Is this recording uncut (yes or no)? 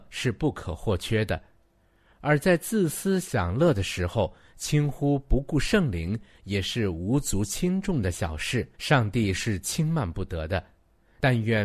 no